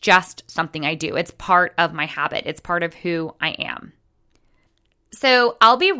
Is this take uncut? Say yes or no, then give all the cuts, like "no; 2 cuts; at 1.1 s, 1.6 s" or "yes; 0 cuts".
yes; 0 cuts